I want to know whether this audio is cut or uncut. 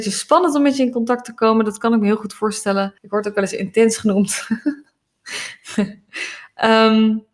cut